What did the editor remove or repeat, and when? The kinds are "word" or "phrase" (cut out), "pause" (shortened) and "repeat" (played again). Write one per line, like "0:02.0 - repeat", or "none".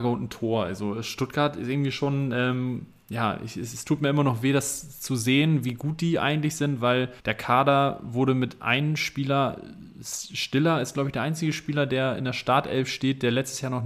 0:07.2 - pause

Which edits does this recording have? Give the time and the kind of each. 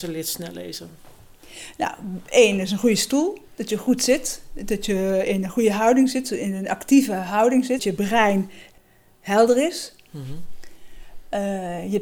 0:07.8 - word

